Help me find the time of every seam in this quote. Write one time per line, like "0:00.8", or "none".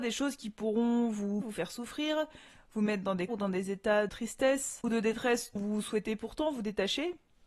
0:01.4
0:03.3
0:04.1
0:05.6

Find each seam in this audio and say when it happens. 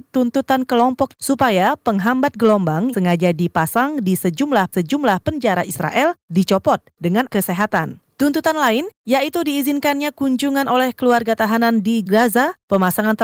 0:01.1
0:02.9
0:04.7
0:07.3
0:12.1

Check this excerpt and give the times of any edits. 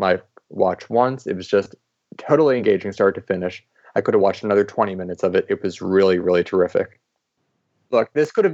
none

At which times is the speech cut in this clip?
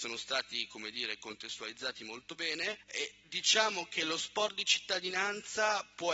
none

